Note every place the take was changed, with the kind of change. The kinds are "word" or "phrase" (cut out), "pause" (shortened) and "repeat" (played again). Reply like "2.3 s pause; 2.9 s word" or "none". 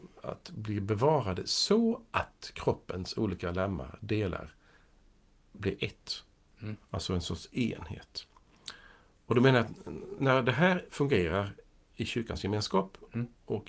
10.2 s word